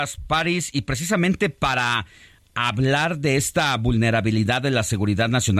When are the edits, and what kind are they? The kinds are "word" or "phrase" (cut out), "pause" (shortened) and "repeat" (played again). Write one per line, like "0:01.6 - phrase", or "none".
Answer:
none